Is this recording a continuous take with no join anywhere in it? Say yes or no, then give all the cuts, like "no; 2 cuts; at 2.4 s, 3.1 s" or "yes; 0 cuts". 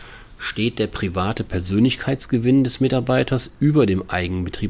yes; 0 cuts